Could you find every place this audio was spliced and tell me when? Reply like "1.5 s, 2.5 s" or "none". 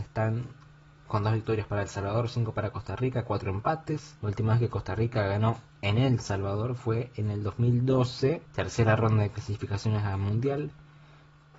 4.2 s, 5.7 s, 8.5 s

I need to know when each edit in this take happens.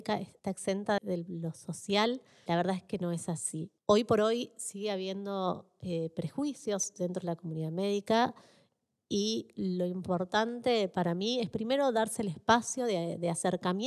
1.0 s, 2.5 s

